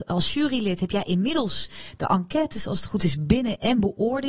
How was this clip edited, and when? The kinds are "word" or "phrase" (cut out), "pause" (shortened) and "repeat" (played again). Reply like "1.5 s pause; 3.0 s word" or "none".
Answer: none